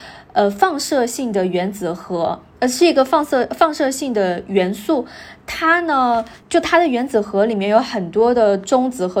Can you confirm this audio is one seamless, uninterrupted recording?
yes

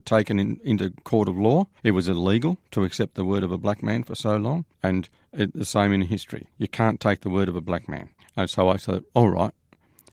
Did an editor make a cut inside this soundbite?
yes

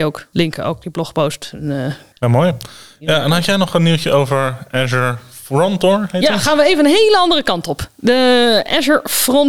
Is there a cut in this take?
no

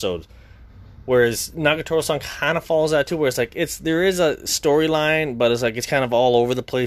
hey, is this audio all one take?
yes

